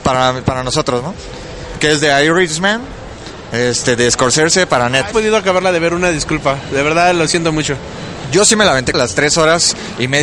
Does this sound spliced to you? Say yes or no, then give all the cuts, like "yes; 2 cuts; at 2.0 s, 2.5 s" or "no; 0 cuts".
yes; 2 cuts; at 5.1 s, 8.9 s